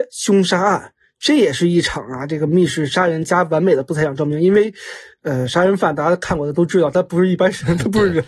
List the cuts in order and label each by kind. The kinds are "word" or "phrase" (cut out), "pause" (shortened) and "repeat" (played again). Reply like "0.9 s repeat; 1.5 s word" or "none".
none